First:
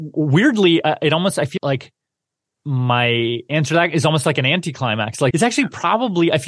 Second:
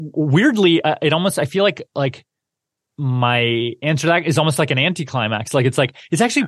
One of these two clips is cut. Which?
first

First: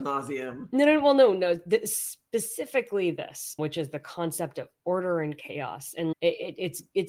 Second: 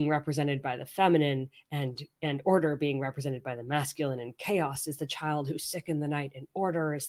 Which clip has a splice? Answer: first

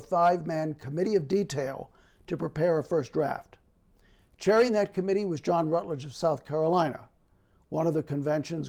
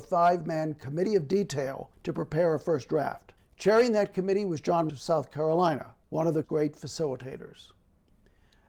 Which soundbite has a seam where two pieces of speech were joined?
second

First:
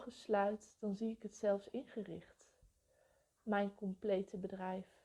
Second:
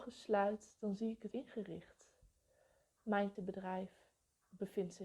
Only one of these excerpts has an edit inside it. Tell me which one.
second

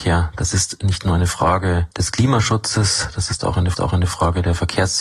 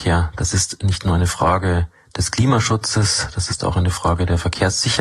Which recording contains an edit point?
first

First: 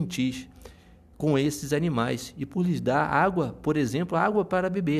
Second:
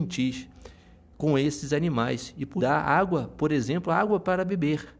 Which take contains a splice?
second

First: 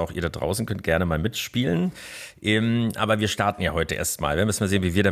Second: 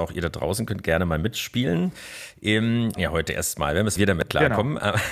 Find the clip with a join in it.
second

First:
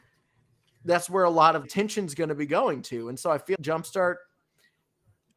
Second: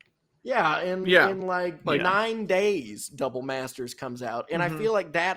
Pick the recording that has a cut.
first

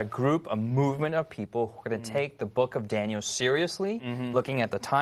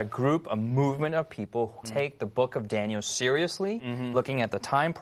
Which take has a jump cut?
second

